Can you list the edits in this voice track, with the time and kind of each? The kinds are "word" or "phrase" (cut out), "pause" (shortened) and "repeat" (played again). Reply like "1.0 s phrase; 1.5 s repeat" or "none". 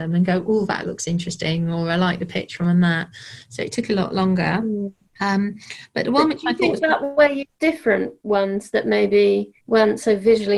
5.0 s pause; 9.6 s pause